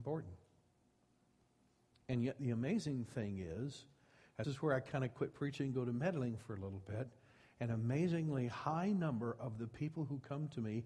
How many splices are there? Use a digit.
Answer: 1